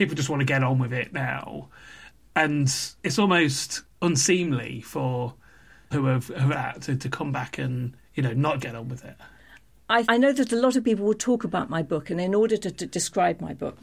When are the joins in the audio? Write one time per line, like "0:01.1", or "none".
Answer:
0:05.9
0:06.5
0:08.6
0:10.0